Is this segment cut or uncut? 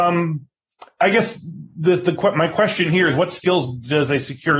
uncut